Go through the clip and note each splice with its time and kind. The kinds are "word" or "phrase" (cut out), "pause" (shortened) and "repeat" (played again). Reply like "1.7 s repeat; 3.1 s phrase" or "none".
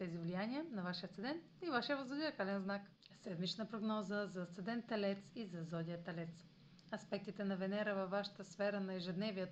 none